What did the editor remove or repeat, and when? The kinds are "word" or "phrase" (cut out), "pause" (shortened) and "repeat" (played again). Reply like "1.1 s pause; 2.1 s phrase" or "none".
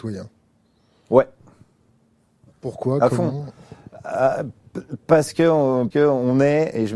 5.9 s word